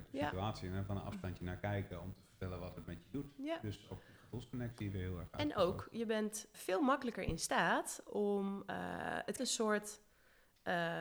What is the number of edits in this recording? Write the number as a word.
two